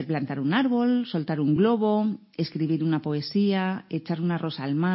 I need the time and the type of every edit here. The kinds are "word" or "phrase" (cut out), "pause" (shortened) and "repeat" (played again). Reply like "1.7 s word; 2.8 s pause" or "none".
none